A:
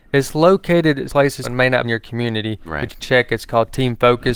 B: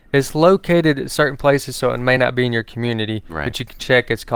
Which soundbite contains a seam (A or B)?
A